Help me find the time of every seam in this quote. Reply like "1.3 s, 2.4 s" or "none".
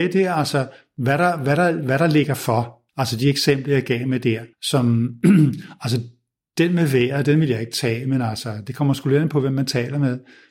2.9 s, 4.5 s